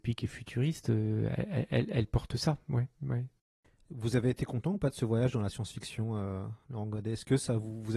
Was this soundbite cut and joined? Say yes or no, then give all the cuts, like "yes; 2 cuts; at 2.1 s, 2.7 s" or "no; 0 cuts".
no; 0 cuts